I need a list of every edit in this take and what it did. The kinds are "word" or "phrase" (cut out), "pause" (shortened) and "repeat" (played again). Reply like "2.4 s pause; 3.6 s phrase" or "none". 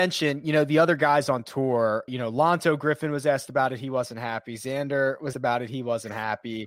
2.1 s word; 5.3 s word